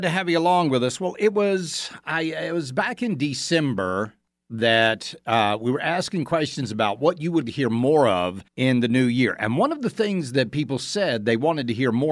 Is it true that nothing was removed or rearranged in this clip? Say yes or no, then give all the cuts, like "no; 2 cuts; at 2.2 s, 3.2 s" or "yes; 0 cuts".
no; 3 cuts; at 4.3 s, 7.4 s, 8.5 s